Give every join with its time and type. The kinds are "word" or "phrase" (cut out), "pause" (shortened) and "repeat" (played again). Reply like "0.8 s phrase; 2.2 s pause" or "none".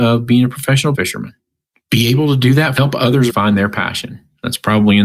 0.9 s word; 2.8 s phrase; 3.3 s phrase